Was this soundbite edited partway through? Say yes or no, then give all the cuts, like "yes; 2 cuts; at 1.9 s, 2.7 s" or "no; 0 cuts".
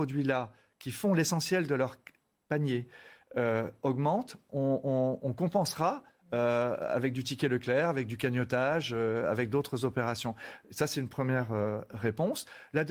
no; 0 cuts